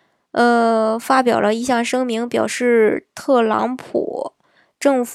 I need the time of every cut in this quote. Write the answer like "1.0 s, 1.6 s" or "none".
none